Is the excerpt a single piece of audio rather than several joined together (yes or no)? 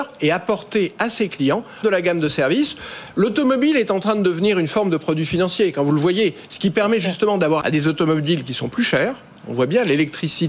no